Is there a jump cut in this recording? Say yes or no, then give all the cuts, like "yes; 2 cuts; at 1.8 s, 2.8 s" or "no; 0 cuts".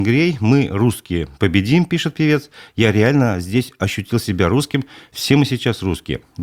no; 0 cuts